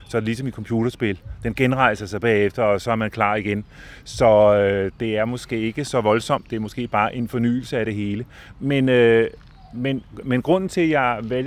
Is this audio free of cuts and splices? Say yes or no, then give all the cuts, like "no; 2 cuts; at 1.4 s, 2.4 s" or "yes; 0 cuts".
yes; 0 cuts